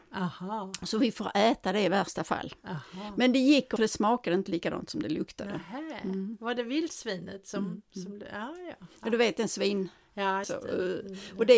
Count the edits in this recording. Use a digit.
2